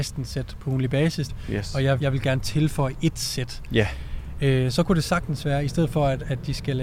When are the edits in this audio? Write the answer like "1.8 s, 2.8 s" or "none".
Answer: 1.3 s, 2.0 s

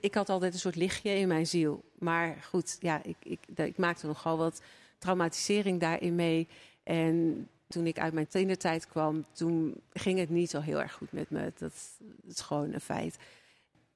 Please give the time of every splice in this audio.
none

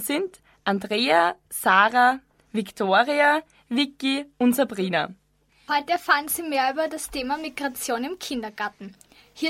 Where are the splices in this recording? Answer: none

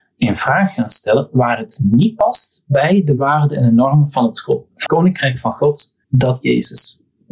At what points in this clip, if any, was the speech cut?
4.9 s, 6.0 s

